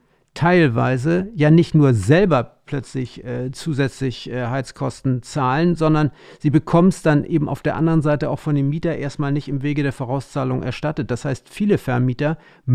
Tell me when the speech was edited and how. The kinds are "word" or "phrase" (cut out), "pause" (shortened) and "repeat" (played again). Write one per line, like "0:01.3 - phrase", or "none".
none